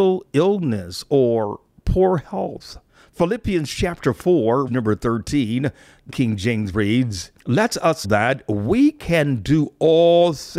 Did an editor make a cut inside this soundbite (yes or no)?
yes